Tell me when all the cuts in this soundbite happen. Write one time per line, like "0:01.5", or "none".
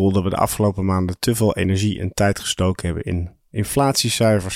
none